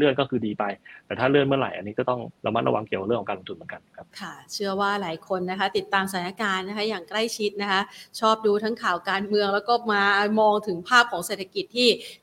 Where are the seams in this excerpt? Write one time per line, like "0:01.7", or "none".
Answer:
0:02.4
0:04.1